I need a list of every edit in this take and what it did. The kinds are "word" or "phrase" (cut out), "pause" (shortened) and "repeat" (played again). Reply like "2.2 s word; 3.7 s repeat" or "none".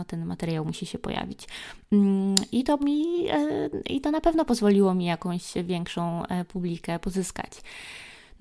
2.8 s word

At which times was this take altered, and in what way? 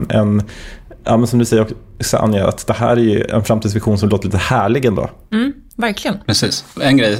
none

